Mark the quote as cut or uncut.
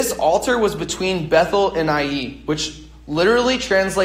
uncut